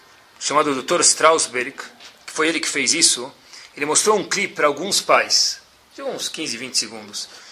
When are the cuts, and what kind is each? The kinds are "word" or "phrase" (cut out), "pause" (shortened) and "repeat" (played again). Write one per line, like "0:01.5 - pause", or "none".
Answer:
none